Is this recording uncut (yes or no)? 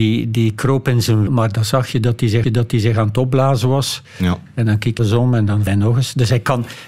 no